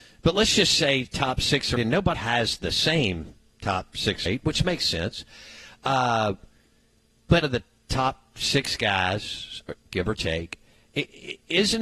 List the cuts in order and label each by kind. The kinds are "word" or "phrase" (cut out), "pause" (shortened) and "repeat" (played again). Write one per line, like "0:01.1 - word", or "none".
0:01.8 - word
0:02.1 - word
0:04.3 - word
0:07.4 - word

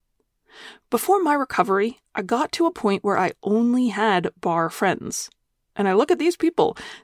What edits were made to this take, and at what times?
none

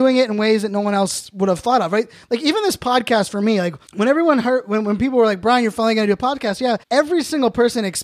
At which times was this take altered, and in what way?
0:03.9 - pause
0:06.8 - pause

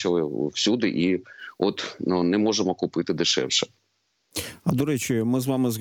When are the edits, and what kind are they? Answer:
none

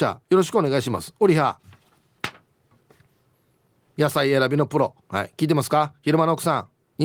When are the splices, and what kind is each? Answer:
0:05.0 - pause

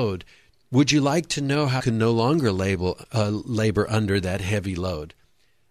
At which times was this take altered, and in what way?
0:01.8 - word

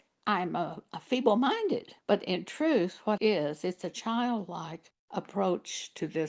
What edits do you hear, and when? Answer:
0:02.0 - pause
0:03.2 - word

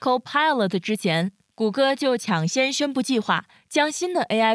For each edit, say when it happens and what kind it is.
none

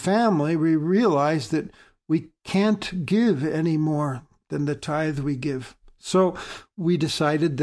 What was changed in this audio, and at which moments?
0:02.4 - pause

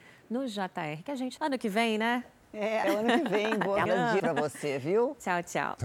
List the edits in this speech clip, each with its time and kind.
0:01.4 - word
0:02.8 - word
0:03.9 - word
0:04.2 - word

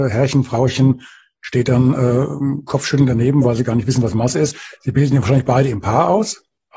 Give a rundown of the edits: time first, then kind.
none

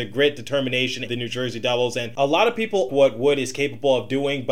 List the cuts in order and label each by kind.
0:01.1 - phrase
0:02.9 - word

